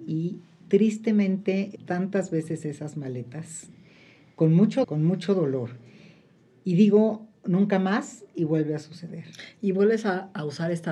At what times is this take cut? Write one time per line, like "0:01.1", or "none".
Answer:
0:01.8
0:04.8